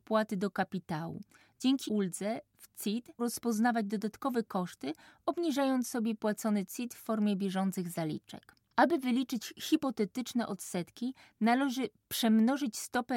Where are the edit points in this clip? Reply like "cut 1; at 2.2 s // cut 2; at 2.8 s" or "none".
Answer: cut 1; at 1.9 s // cut 2; at 3.2 s